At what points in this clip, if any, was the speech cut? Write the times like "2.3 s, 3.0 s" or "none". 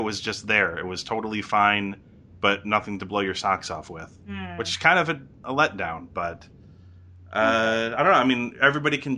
none